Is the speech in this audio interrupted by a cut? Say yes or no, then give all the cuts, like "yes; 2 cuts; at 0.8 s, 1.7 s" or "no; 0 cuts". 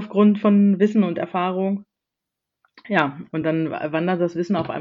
no; 0 cuts